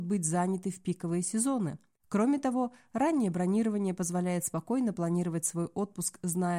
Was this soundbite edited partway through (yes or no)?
no